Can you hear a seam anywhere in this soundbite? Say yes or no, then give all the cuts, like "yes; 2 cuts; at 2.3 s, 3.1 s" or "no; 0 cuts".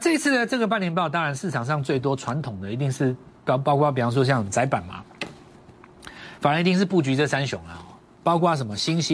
no; 0 cuts